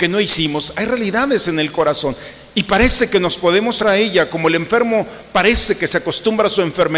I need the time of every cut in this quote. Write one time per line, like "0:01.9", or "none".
0:03.8